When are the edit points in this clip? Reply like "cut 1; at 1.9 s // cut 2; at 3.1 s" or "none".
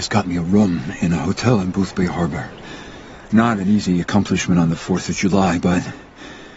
none